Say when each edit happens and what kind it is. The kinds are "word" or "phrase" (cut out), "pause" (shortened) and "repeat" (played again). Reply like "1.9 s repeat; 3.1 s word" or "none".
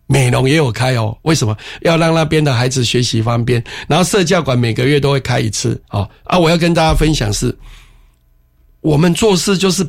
5.8 s pause